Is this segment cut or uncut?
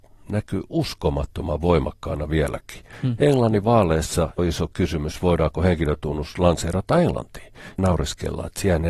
cut